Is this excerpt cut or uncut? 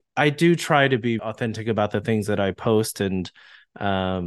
cut